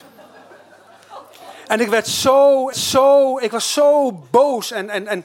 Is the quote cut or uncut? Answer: cut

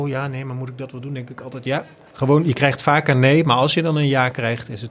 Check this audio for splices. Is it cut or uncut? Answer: uncut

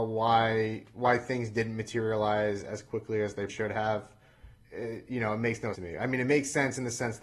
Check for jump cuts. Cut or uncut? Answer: cut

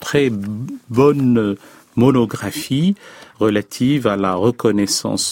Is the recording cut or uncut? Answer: uncut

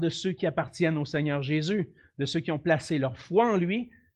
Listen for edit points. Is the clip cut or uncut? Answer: uncut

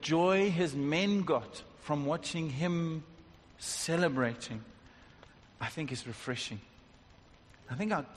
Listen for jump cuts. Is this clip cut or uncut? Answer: uncut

